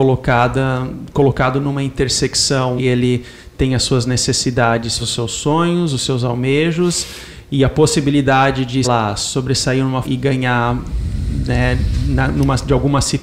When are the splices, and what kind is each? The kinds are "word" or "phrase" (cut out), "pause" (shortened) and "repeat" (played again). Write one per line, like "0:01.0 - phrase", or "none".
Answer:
0:02.8 - word
0:05.0 - word
0:08.8 - word
0:10.0 - word